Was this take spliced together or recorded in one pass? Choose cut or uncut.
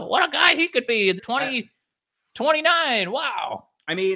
cut